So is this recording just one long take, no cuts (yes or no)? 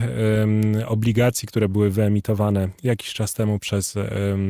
yes